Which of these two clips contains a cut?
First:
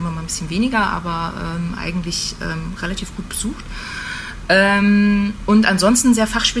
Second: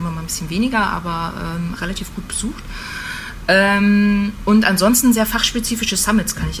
second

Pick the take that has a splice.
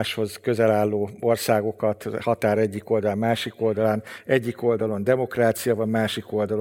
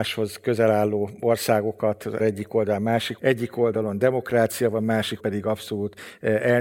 second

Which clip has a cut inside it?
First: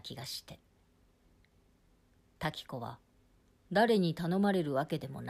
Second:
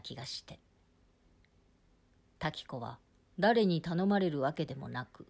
second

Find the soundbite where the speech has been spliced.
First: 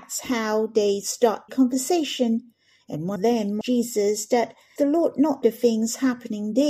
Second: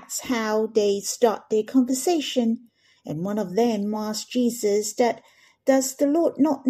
first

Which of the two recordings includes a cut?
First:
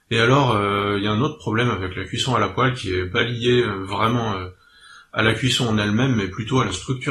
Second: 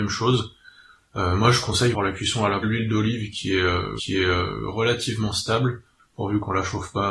second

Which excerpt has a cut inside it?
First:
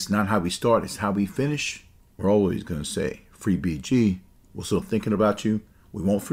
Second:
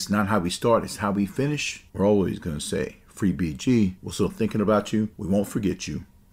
second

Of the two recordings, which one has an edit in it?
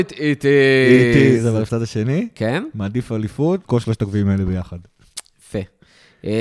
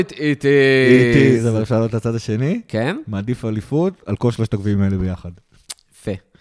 first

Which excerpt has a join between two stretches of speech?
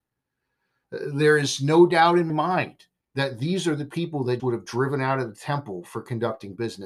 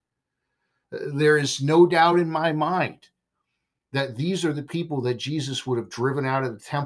first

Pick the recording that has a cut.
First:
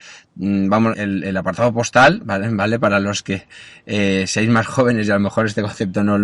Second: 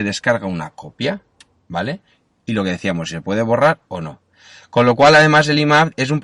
first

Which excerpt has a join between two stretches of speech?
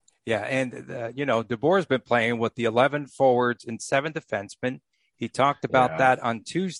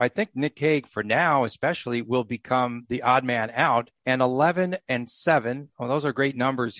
second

